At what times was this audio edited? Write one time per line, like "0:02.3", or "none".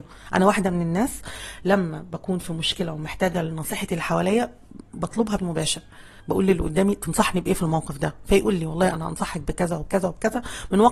0:05.4